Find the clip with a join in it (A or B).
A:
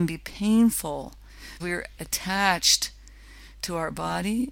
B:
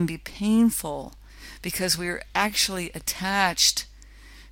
A